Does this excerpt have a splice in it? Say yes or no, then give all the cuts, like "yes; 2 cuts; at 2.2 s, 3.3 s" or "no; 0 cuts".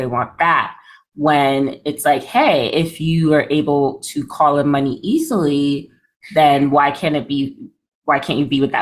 no; 0 cuts